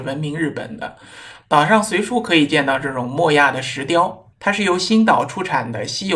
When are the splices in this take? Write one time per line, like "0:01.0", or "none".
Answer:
0:04.3